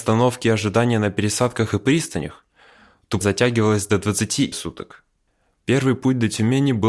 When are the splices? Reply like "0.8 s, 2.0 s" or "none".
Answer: 3.2 s, 4.5 s